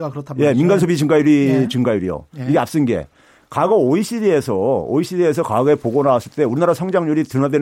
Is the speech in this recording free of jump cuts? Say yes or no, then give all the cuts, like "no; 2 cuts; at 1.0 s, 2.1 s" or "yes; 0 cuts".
yes; 0 cuts